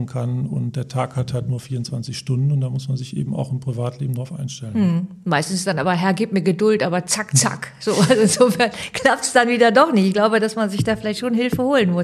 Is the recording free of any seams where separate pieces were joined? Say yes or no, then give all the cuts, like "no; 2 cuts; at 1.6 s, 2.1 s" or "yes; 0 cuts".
yes; 0 cuts